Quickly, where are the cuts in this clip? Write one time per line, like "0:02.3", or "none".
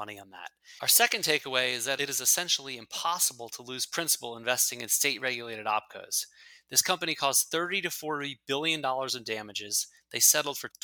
none